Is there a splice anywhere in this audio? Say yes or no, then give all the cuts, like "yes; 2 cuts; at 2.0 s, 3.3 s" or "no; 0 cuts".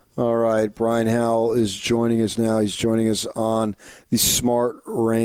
no; 0 cuts